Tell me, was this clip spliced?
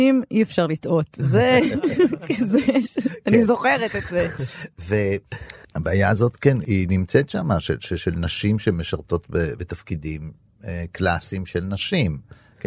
no; 0 cuts

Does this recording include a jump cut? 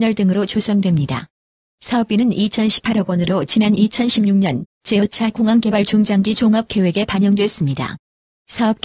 no; 0 cuts

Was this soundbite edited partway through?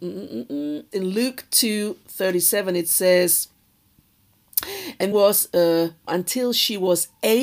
yes; 3 cuts; at 0.9 s, 5.1 s, 6.1 s

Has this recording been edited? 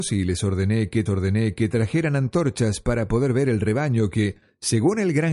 yes; 1 cut; at 1.1 s

